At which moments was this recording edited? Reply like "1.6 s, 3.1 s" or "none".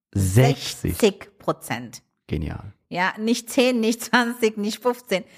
none